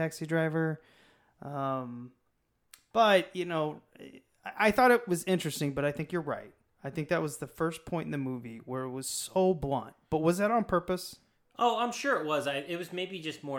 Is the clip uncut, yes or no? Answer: yes